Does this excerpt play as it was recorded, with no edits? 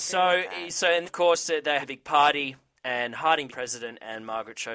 no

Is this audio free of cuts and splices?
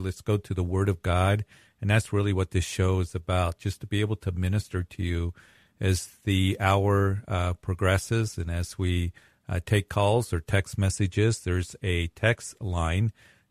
yes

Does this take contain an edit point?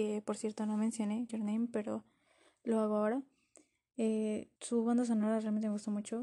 yes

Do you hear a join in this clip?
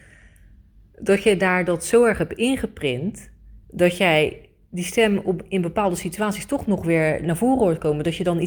yes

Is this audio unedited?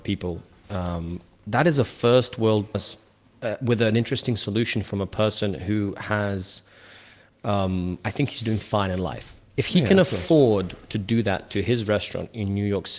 no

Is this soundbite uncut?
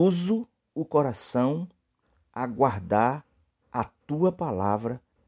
yes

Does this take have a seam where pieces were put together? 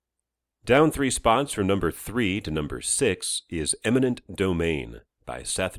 no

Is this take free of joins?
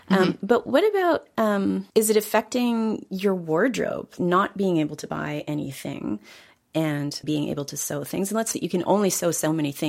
no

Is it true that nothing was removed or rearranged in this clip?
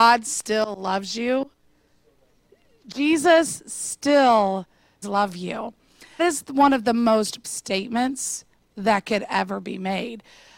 no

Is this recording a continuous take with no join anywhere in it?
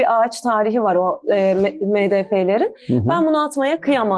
yes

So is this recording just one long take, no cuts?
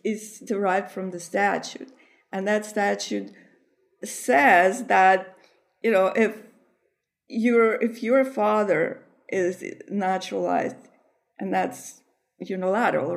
yes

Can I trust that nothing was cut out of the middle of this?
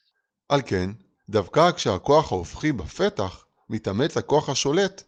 yes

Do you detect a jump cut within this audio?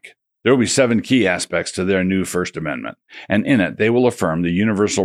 no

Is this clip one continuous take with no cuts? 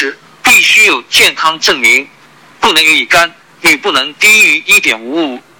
yes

